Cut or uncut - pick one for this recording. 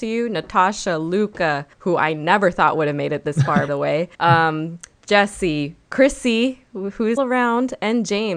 cut